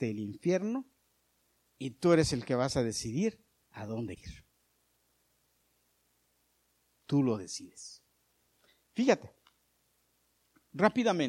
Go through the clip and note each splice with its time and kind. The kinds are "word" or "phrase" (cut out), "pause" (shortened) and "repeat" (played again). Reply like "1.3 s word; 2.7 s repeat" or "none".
4.2 s word